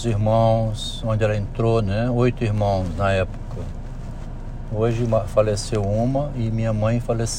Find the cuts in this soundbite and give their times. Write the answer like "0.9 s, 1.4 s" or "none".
none